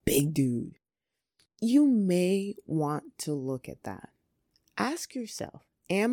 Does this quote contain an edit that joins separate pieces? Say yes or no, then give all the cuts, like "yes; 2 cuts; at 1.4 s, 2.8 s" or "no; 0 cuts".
no; 0 cuts